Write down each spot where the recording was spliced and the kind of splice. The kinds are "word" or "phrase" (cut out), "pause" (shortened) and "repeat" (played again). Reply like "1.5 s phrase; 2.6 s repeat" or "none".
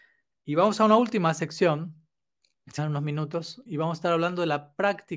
2.8 s word; 3.7 s word